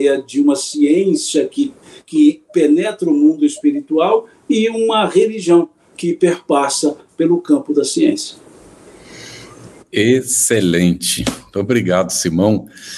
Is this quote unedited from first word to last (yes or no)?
yes